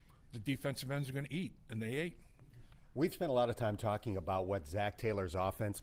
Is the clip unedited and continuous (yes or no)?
yes